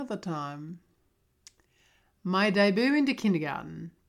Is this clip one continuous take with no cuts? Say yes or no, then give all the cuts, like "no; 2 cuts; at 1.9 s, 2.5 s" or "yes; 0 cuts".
yes; 0 cuts